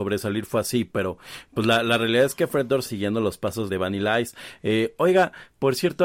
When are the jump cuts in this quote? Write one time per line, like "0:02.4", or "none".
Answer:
0:02.9
0:03.7